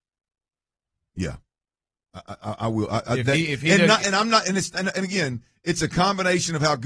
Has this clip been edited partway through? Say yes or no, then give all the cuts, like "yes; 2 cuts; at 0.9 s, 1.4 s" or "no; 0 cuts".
no; 0 cuts